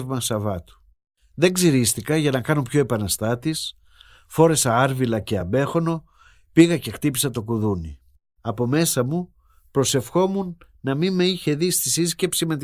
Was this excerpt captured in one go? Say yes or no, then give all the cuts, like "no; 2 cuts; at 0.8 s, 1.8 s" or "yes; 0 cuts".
yes; 0 cuts